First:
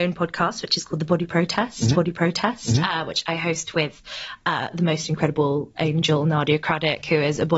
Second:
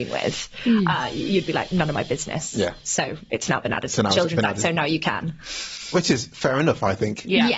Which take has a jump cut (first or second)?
first